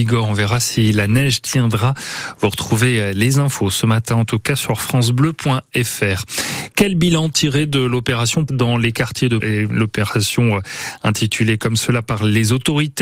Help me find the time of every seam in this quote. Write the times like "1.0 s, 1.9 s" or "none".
8.5 s, 9.4 s

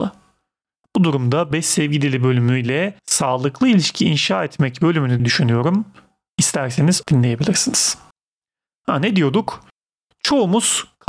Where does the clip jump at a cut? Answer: 3.0 s, 5.2 s, 7.0 s

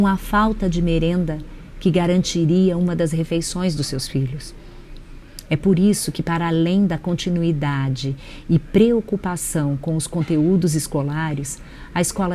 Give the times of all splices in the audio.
none

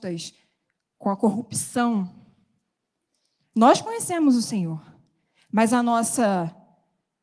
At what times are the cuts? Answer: none

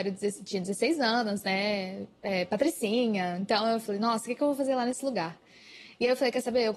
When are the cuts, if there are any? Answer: none

